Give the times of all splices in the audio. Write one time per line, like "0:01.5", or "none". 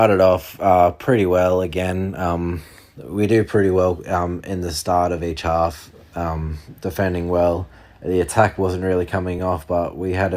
none